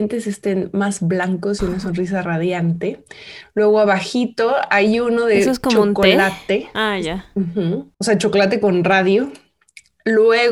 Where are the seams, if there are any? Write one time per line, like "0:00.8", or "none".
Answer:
0:07.9